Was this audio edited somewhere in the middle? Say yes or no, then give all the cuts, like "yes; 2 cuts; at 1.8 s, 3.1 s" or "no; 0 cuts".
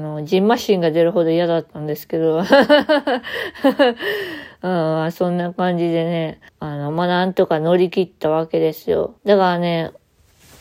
yes; 2 cuts; at 6.5 s, 9.2 s